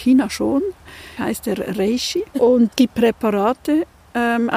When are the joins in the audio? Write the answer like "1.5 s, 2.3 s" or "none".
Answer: 1.2 s, 2.7 s